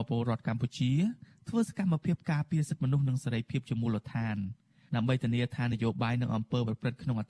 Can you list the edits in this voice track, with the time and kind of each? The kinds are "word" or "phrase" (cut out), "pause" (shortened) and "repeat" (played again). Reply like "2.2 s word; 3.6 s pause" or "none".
none